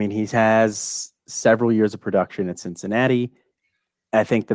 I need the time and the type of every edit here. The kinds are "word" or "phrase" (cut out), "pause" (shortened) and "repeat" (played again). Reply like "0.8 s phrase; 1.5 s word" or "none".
none